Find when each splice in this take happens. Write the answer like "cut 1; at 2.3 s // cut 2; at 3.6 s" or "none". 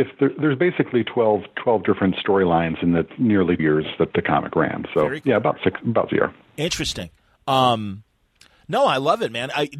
cut 1; at 3.6 s // cut 2; at 4.1 s // cut 3; at 6.1 s